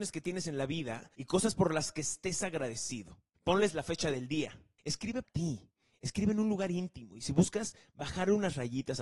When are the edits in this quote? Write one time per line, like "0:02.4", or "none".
0:01.1
0:05.2